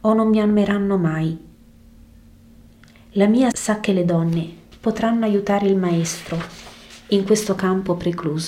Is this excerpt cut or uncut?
cut